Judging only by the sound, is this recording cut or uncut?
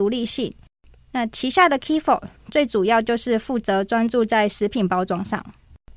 uncut